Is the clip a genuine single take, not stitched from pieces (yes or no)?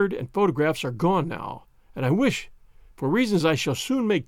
yes